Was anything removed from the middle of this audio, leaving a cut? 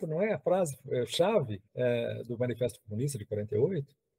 yes; 1 cut; at 1.7 s

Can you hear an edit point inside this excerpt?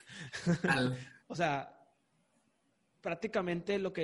yes; 1 cut; at 1.2 s

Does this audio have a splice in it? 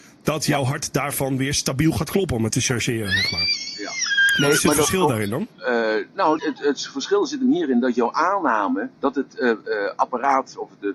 yes; 4 cuts; at 2.5 s, 5.5 s, 6.4 s, 8.9 s

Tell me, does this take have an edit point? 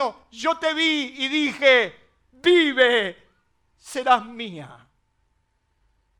no; 0 cuts

